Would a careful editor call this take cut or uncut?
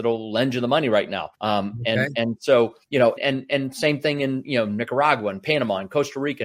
cut